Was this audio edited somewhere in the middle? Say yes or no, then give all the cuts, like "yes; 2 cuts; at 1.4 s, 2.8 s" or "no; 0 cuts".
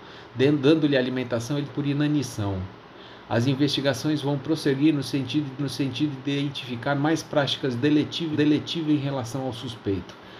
yes; 3 cuts; at 1.7 s, 5.6 s, 8.3 s